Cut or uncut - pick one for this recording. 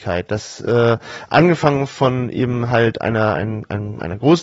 uncut